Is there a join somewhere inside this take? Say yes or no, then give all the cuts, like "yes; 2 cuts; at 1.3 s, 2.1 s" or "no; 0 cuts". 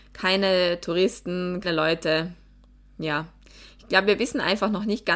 yes; 1 cut; at 1.6 s